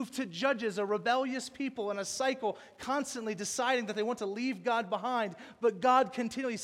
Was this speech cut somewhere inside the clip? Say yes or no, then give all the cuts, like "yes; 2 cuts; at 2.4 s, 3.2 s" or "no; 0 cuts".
no; 0 cuts